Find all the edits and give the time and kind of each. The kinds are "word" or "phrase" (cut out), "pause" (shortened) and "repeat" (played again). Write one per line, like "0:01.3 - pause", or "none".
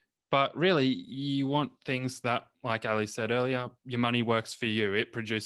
0:02.5 - pause
0:03.8 - pause

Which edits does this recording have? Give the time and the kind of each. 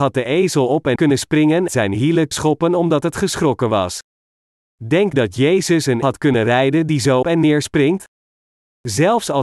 0:01.0 - word
0:01.7 - phrase
0:02.3 - word
0:05.1 - word
0:06.0 - word
0:07.2 - word

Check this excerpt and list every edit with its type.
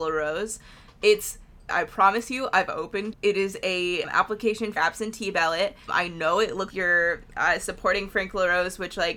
0:01.7 - word
0:03.1 - word
0:04.0 - word
0:04.8 - word
0:05.9 - word
0:06.7 - word

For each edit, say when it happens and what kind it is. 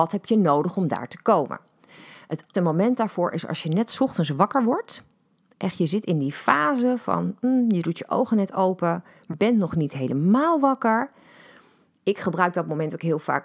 0:02.5 - word
0:09.3 - word

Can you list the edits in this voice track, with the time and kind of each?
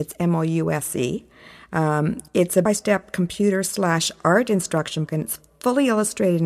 0:02.3 - pause
0:02.6 - phrase
0:05.1 - word

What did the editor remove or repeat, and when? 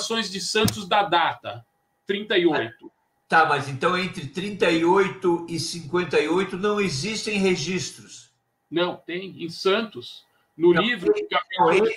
0:08.5 - pause

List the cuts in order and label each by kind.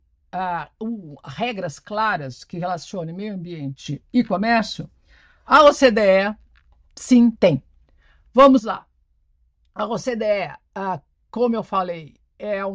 none

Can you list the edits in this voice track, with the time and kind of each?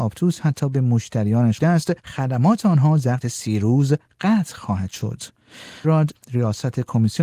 0:01.6 - word
0:02.0 - pause
0:03.2 - word
0:05.8 - word
0:06.1 - word

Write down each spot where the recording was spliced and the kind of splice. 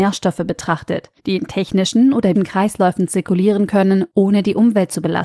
0:01.2 - pause
0:02.3 - word

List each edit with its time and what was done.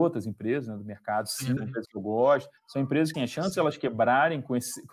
0:01.6 - word
0:02.6 - pause
0:03.1 - word

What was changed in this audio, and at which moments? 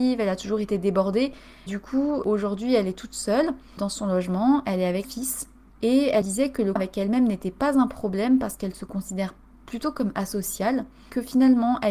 0:01.7 - word
0:05.0 - word
0:06.2 - word
0:06.8 - word

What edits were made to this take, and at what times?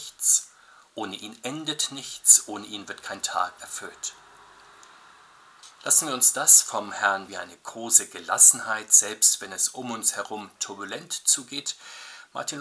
0:03.6 - word
0:05.7 - pause
0:07.3 - phrase

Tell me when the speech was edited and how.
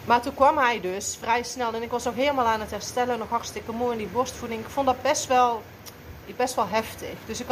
none

